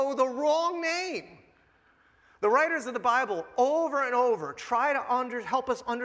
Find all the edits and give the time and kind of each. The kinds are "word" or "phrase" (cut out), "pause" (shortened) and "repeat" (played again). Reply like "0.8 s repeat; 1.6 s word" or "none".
none